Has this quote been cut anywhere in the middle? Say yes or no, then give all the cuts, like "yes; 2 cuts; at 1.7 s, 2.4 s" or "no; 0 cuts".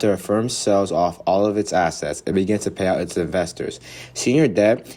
no; 0 cuts